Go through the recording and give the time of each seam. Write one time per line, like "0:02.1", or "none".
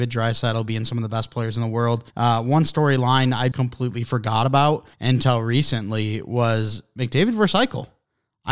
0:02.1
0:03.5
0:04.9